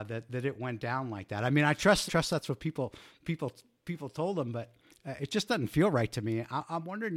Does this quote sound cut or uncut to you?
cut